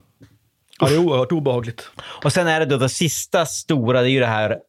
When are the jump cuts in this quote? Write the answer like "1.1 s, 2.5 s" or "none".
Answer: 1.9 s